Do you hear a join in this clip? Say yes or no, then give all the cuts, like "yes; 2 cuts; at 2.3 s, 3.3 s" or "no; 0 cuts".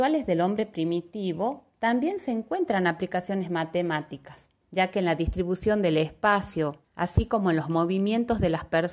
yes; 2 cuts; at 4.6 s, 6.8 s